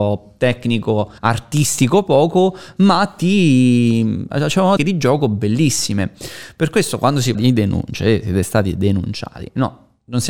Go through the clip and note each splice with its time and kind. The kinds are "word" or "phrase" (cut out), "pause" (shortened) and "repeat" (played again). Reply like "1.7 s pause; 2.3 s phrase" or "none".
1.2 s pause; 4.8 s word; 7.3 s word

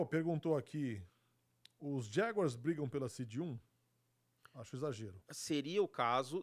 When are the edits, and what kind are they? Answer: none

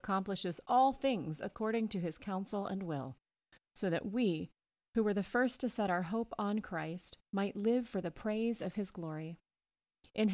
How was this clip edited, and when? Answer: none

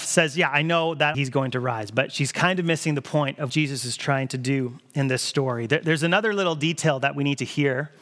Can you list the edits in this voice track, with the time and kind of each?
1.1 s phrase; 3.5 s word

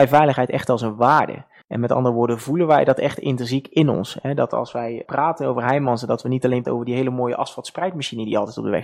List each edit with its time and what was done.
1.6 s pause; 5.0 s word; 6.6 s word

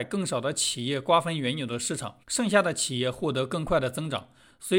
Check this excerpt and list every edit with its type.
2.2 s pause

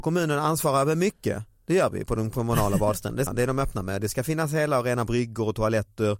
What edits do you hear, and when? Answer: 3.3 s word

